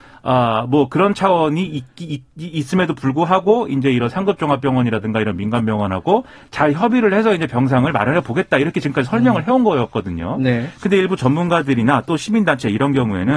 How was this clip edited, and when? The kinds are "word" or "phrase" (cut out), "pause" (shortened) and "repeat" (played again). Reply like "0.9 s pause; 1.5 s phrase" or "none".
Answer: none